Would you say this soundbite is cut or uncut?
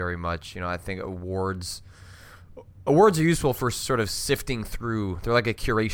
uncut